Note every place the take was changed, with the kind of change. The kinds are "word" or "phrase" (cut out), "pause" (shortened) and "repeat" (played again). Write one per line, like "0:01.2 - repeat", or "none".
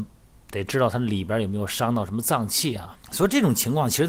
0:03.0 - pause